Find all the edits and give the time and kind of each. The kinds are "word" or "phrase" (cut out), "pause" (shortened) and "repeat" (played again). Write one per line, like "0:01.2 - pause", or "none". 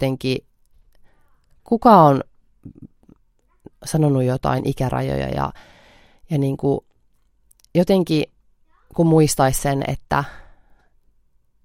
0:03.7 - pause